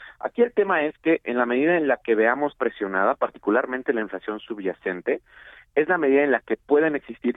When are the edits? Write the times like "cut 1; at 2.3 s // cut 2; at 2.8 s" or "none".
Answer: cut 1; at 2.6 s